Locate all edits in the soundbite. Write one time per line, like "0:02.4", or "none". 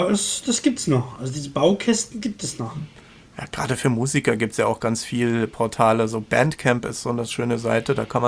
none

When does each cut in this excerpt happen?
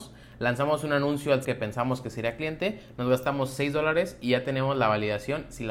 0:01.4

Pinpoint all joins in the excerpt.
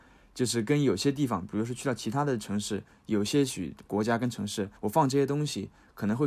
0:04.8

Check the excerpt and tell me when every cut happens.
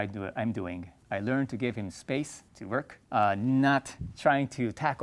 0:01.0
0:02.5
0:03.0

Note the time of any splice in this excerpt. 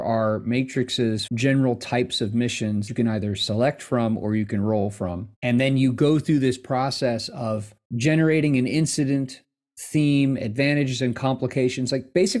0:01.3
0:02.9
0:05.4
0:07.8

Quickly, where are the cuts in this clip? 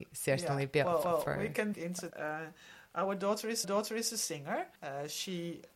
0:01.0
0:01.7
0:02.1
0:03.6
0:04.8

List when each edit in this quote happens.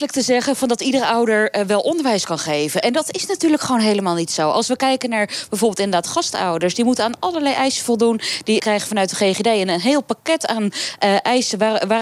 0:08.6

